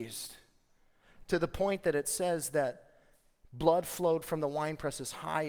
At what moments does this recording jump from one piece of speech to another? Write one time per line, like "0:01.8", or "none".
none